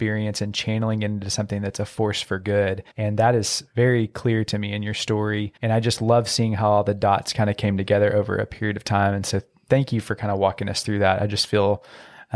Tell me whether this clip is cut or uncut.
cut